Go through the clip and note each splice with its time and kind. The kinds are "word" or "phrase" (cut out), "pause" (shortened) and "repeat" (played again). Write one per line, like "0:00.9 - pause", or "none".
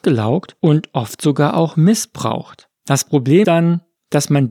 0:02.7 - pause
0:03.4 - word